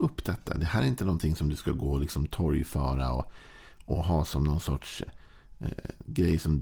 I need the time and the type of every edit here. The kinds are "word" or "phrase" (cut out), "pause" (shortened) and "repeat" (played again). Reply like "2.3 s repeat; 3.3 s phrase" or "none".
5.1 s word